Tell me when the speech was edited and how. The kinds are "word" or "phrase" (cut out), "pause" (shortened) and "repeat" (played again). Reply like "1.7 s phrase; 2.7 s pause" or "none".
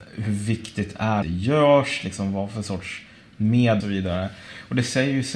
1.2 s phrase; 3.8 s phrase